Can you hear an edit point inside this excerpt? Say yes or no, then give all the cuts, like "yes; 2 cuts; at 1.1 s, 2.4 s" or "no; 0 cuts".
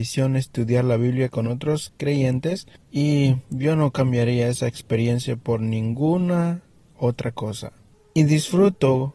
no; 0 cuts